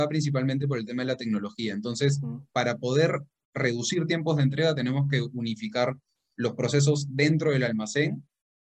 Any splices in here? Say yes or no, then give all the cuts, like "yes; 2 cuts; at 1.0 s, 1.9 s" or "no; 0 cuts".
no; 0 cuts